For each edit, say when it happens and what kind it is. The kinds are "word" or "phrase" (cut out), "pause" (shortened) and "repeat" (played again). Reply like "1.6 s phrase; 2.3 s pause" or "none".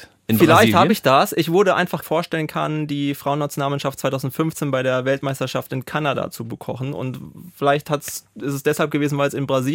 2.0 s phrase